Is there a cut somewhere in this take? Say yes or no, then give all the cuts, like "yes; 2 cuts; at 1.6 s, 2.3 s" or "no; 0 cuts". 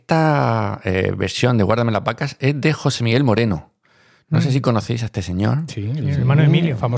no; 0 cuts